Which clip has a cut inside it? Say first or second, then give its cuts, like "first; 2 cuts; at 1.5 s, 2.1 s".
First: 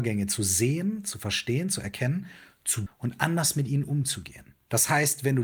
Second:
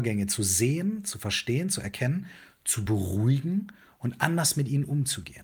first; 1 cut; at 2.9 s